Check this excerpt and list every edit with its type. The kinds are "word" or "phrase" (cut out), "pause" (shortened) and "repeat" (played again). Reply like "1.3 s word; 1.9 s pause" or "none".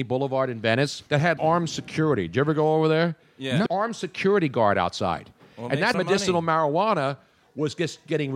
1.1 s pause; 1.4 s word; 3.7 s phrase; 5.9 s word